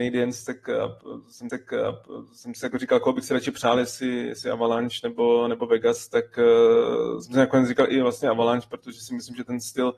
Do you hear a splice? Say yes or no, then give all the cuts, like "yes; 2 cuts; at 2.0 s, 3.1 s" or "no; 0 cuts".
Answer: yes; 1 cut; at 1.5 s